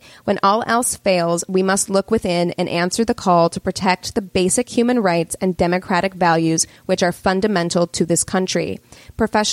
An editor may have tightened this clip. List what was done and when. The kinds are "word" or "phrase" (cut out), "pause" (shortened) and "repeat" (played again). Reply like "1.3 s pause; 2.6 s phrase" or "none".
none